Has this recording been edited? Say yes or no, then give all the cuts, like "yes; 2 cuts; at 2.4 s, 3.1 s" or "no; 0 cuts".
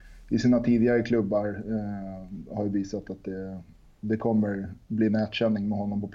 no; 0 cuts